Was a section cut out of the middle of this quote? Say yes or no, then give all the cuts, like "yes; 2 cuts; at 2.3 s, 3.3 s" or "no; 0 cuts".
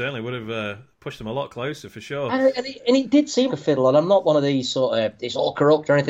yes; 1 cut; at 3.5 s